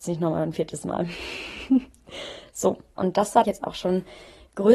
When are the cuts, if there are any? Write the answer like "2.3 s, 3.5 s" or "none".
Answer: 3.0 s, 3.4 s